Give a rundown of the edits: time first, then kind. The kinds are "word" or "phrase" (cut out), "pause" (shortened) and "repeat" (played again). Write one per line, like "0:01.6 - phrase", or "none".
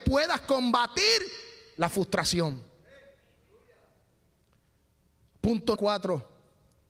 0:05.8 - word